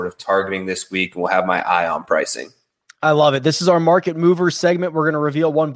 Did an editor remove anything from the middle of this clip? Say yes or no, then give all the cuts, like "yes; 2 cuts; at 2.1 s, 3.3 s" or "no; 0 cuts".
no; 0 cuts